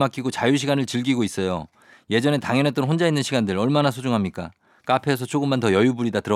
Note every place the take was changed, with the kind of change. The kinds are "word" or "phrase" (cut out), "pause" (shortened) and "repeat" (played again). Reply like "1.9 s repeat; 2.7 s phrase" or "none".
none